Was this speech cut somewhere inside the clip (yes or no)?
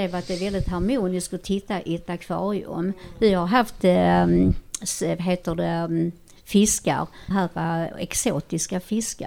yes